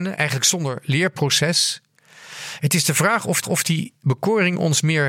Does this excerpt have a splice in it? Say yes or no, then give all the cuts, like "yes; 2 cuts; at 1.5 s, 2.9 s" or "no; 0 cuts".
yes; 1 cut; at 3.4 s